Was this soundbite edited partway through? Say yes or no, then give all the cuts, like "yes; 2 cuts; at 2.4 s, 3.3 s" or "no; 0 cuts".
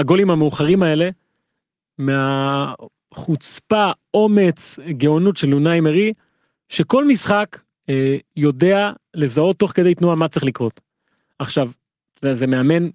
no; 0 cuts